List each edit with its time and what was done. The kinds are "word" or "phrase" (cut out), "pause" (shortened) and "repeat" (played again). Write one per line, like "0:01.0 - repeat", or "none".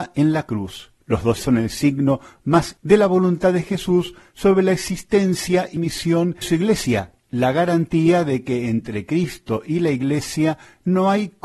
0:01.0 - pause
0:01.4 - word
0:02.8 - word
0:05.8 - word
0:06.4 - word
0:07.2 - pause

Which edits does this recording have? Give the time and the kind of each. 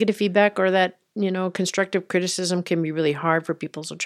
none

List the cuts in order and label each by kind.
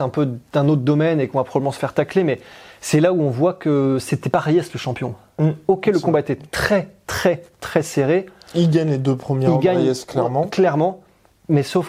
none

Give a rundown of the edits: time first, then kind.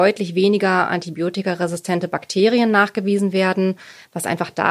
none

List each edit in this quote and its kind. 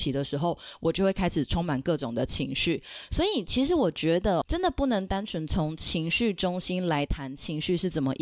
0:04.4 - word

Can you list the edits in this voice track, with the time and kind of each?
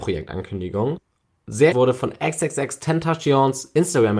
0:01.7 - word

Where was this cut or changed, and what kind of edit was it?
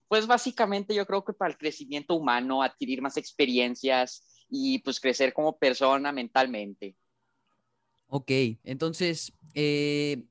0:08.6 - pause

